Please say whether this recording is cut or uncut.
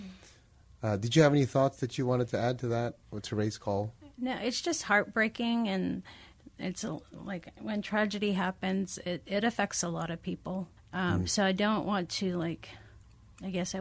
cut